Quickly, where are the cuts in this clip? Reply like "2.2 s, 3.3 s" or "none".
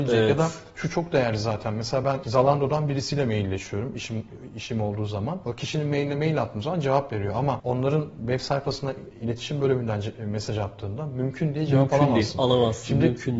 none